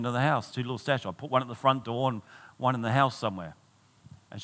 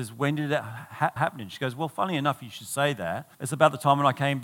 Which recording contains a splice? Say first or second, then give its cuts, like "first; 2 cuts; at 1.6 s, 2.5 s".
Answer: second; 2 cuts; at 1.2 s, 3.3 s